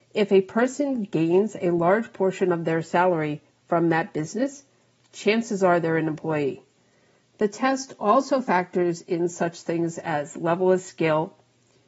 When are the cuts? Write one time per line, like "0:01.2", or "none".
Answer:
none